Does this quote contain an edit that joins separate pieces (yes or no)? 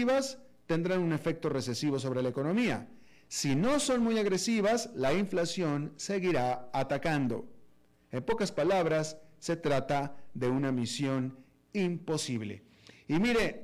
no